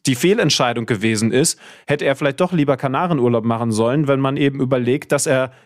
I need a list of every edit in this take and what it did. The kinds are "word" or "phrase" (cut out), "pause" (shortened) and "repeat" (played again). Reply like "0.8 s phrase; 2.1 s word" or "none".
none